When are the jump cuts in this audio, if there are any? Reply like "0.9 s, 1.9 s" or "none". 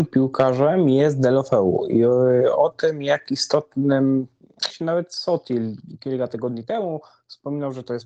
4.7 s

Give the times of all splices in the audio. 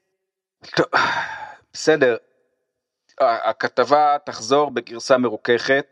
none

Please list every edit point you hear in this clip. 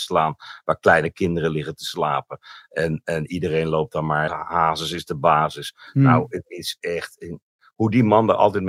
4.3 s

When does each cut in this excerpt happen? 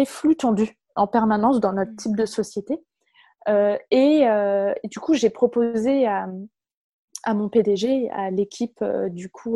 none

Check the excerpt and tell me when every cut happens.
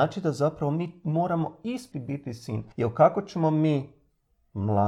1.9 s, 2.7 s

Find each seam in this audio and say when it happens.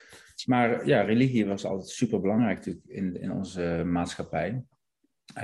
none

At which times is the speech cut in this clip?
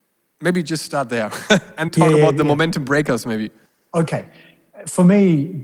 1.9 s, 3.7 s

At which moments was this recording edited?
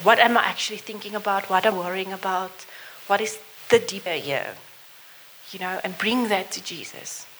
1.7 s, 4.1 s

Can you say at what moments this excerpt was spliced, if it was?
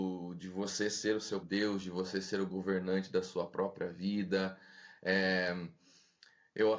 1.4 s

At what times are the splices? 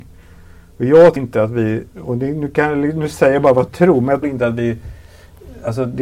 1.2 s, 1.9 s, 4.2 s

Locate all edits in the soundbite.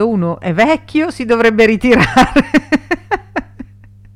none

